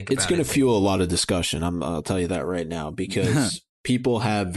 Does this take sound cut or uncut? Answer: uncut